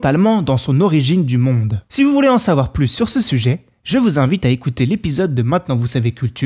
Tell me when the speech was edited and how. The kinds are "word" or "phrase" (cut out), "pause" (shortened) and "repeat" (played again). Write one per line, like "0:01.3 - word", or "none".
none